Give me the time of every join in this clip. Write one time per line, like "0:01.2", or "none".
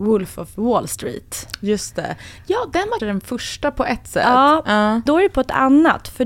0:03.0
0:05.1